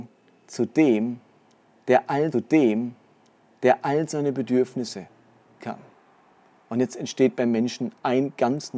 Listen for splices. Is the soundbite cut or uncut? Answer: cut